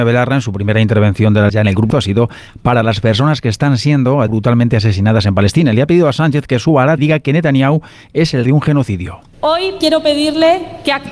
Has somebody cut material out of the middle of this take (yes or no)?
yes